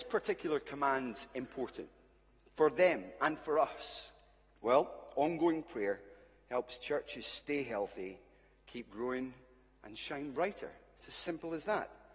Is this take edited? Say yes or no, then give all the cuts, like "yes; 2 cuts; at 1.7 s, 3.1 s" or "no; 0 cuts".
no; 0 cuts